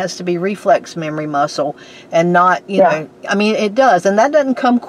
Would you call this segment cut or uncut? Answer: uncut